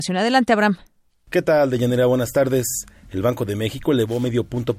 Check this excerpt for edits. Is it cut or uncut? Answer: uncut